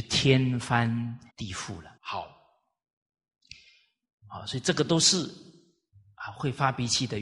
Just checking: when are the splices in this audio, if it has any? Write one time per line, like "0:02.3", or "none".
0:01.3
0:02.0